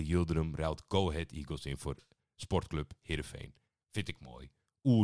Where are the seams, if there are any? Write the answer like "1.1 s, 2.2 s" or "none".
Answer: none